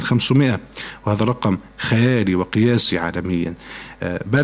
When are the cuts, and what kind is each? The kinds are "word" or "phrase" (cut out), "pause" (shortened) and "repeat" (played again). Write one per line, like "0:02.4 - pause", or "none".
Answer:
none